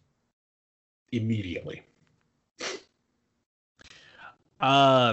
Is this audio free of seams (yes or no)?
yes